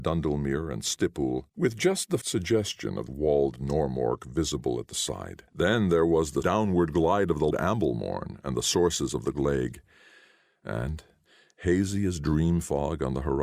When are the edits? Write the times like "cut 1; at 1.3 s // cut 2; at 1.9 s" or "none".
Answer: cut 1; at 1.5 s // cut 2; at 2.2 s // cut 3; at 3.1 s // cut 4; at 5.5 s // cut 5; at 6.4 s // cut 6; at 7.5 s